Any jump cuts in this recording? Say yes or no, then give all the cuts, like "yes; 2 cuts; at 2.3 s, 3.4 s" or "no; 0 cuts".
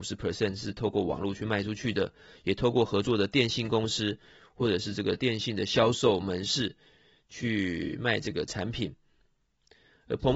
no; 0 cuts